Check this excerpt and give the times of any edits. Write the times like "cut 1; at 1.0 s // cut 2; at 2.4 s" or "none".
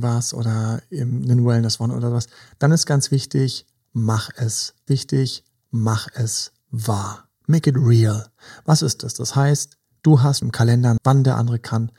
cut 1; at 4.9 s // cut 2; at 10.4 s // cut 3; at 11.0 s